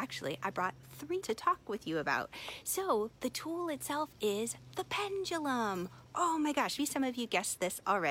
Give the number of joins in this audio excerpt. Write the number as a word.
two